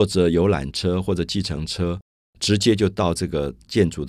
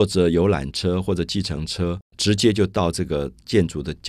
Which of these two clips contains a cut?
second; 1 cut; at 2.1 s

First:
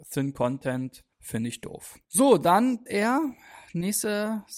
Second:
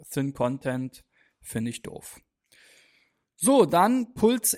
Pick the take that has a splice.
first; 3 cuts; at 1.1 s, 2.0 s, 2.9 s

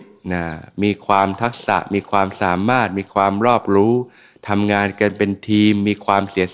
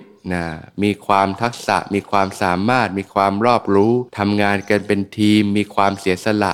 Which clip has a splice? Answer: second; 1 cut; at 4.1 s

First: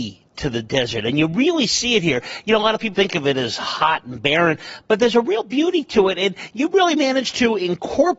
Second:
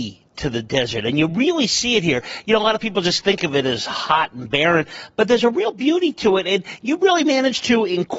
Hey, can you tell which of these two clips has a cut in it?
first; 1 cut; at 2.9 s

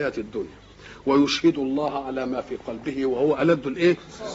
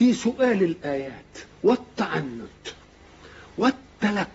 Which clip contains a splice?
second; 1 cut; at 1.5 s

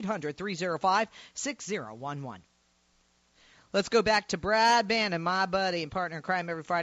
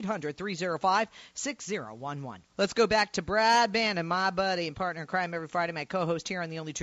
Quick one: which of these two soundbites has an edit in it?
second; 1 cut; at 2.5 s

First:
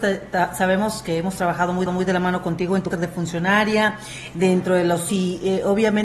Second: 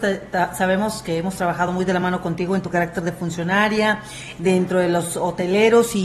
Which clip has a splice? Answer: first; 3 cuts; at 1.9 s, 2.9 s, 5.1 s

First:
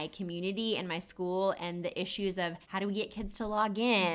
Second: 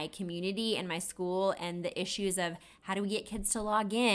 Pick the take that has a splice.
first; 1 cut; at 2.6 s

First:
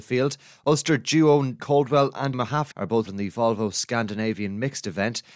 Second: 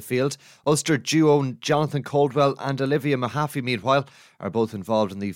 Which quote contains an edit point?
first; 4 cuts; at 1.6 s, 2.3 s, 2.7 s, 3.1 s

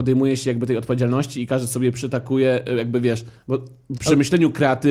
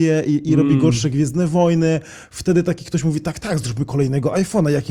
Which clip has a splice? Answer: first; 1 cut; at 3.9 s

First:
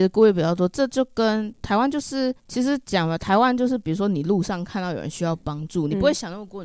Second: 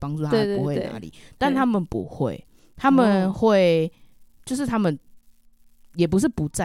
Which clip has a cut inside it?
first; 1 cut; at 2.4 s

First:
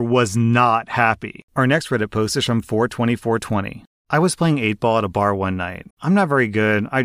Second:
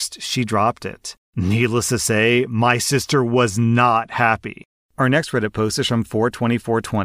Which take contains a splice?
first; 2 cuts; at 1.5 s, 5.9 s

